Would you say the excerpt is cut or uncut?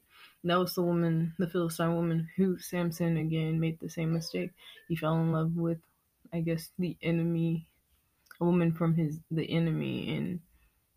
uncut